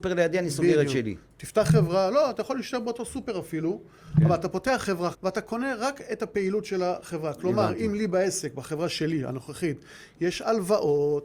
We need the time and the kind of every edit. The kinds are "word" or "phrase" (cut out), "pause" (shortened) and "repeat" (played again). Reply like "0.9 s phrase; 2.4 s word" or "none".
5.1 s word